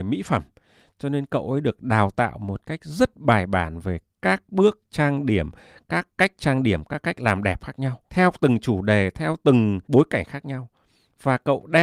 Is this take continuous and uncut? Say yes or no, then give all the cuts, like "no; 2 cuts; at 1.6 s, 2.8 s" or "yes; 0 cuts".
no; 2 cuts; at 8.1 s, 9.8 s